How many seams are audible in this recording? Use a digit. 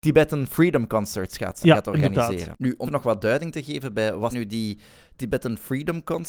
3